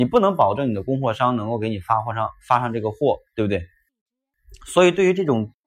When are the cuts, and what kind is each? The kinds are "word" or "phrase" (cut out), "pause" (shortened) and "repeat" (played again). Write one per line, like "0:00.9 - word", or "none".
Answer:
0:03.3 - pause